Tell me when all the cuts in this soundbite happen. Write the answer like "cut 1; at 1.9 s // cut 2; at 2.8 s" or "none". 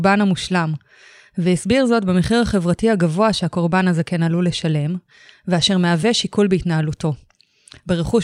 none